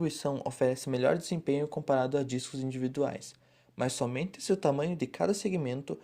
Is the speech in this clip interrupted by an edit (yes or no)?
no